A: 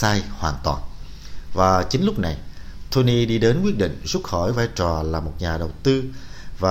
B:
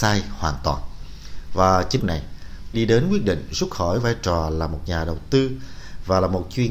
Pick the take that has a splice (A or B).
B